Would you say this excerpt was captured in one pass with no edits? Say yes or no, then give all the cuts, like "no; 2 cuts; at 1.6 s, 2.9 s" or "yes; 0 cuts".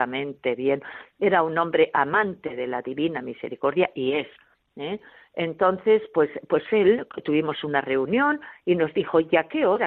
yes; 0 cuts